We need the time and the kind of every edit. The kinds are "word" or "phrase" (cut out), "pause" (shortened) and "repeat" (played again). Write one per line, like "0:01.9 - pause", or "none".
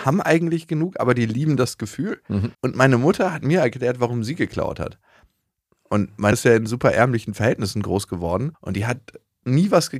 0:02.5 - pause
0:06.3 - word
0:08.5 - pause